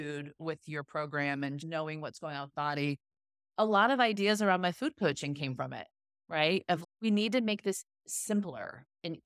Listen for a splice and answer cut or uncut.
cut